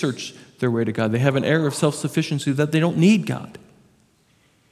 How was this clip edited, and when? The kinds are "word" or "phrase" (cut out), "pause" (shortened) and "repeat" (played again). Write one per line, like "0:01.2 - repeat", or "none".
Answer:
none